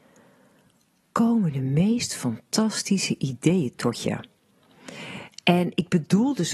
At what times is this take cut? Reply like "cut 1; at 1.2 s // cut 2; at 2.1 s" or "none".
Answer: none